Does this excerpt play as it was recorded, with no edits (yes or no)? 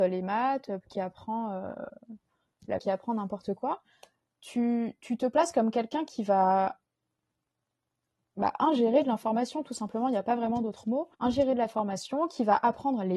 no